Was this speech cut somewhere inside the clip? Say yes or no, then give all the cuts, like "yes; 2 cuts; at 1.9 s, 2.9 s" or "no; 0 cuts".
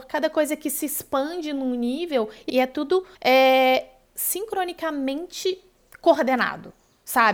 yes; 2 cuts; at 2.5 s, 3.1 s